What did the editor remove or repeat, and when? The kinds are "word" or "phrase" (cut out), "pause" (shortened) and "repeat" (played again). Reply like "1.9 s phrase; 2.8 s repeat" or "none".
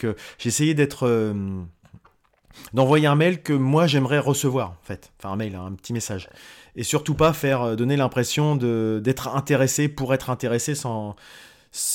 none